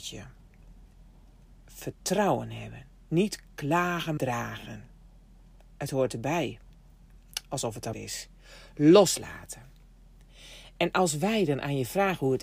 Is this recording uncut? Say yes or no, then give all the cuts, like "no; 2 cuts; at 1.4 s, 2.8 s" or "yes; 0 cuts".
no; 2 cuts; at 4.2 s, 7.9 s